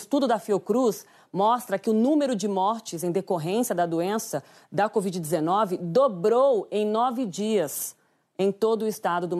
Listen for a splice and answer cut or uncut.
uncut